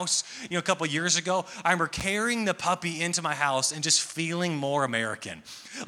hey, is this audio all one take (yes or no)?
yes